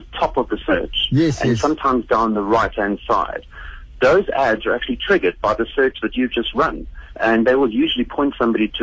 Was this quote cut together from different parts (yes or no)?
no